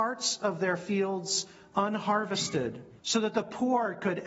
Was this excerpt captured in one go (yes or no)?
no